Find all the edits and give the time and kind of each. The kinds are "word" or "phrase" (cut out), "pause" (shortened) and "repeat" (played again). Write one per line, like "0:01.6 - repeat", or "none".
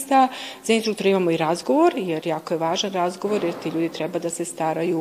none